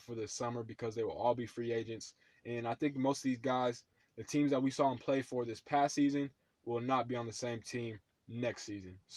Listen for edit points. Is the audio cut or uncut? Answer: uncut